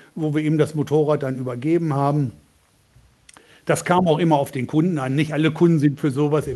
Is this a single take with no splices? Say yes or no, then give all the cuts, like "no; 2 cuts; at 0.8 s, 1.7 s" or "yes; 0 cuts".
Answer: yes; 0 cuts